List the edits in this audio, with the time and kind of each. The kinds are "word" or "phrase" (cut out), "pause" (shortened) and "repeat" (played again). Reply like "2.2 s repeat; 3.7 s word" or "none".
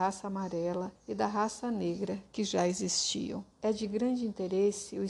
1.0 s pause; 3.5 s pause